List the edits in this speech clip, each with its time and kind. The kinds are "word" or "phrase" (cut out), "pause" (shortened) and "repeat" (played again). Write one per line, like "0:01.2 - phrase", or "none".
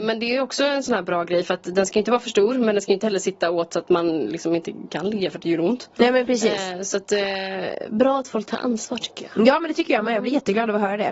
none